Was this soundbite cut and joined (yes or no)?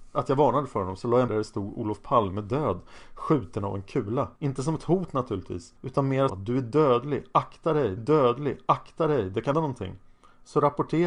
yes